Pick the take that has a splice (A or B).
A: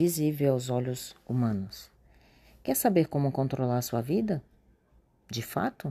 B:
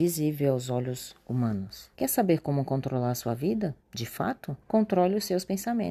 B